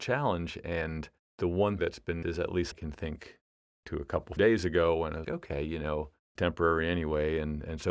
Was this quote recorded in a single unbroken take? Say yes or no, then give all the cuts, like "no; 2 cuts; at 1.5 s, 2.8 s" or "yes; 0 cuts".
no; 7 cuts; at 1.8 s, 2.2 s, 2.7 s, 3.8 s, 4.4 s, 5.2 s, 6.4 s